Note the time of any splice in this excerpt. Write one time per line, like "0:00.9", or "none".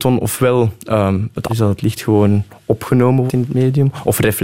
0:01.5
0:03.3